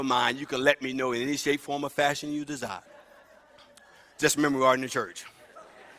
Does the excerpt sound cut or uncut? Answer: cut